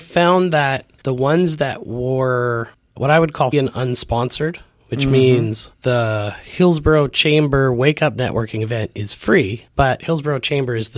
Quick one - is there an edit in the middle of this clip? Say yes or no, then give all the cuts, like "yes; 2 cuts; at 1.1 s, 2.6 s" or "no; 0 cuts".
yes; 3 cuts; at 3.0 s, 3.5 s, 5.7 s